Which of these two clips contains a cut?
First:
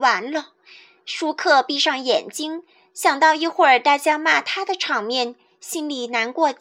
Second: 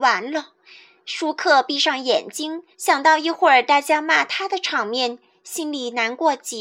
second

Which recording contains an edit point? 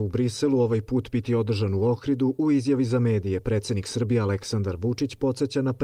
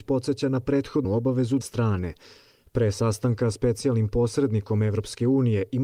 second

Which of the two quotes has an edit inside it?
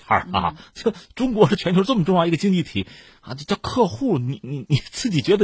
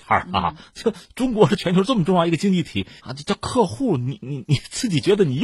second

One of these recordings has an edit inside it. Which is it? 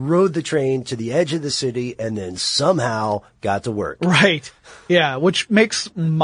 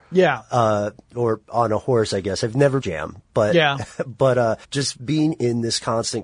second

